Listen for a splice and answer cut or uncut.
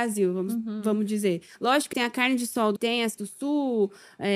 cut